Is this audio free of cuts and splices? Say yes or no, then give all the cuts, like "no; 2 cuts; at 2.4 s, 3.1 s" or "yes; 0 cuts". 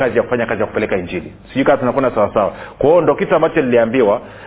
yes; 0 cuts